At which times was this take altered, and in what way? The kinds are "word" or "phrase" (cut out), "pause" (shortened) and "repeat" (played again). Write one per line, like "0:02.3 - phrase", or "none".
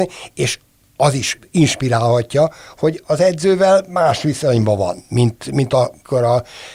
none